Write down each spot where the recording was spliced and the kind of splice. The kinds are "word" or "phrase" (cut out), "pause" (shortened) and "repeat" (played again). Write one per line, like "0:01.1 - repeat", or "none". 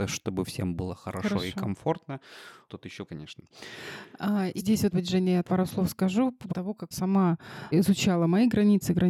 0:02.7 - word
0:03.1 - word
0:04.6 - word
0:04.9 - word
0:05.4 - word
0:06.5 - word
0:06.9 - word
0:07.7 - word